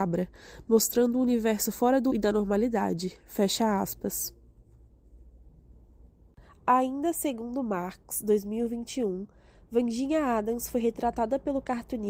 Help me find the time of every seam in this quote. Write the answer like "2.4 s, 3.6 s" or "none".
2.1 s